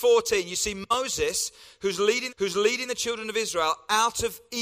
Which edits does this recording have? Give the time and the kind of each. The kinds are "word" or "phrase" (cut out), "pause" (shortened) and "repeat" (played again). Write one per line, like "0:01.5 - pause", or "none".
0:02.3 - repeat